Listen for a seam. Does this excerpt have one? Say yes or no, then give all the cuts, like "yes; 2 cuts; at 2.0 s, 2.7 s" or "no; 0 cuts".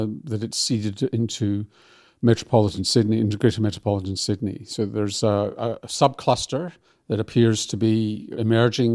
no; 0 cuts